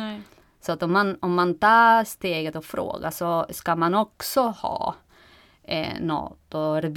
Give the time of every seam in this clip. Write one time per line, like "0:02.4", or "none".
none